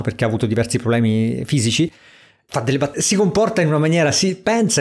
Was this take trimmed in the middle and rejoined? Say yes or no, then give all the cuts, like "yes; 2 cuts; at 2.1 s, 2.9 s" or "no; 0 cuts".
yes; 1 cut; at 2.9 s